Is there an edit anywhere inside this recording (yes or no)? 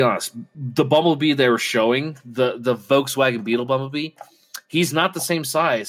no